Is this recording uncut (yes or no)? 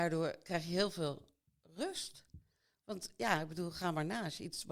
yes